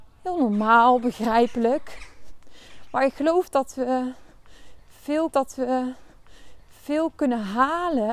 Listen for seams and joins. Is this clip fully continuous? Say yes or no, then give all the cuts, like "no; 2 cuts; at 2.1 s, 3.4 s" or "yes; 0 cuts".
no; 1 cut; at 5.3 s